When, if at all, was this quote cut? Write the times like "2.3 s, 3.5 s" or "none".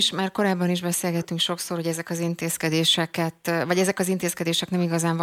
none